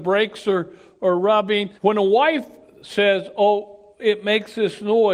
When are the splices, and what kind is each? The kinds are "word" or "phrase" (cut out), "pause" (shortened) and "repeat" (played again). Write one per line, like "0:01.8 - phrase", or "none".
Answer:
0:01.8 - pause

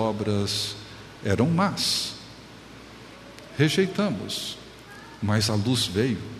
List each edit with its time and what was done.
none

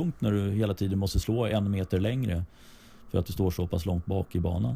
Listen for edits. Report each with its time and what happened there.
none

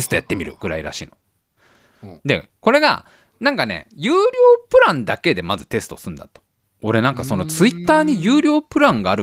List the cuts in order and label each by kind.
0:06.6 - pause

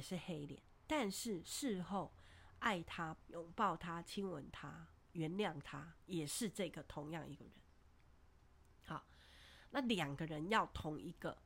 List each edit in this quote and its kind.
0:03.2 - phrase

